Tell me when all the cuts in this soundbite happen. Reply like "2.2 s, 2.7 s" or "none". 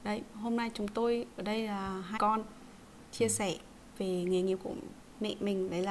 2.2 s